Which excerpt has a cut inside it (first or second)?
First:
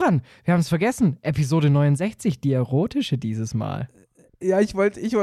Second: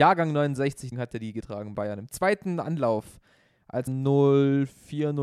second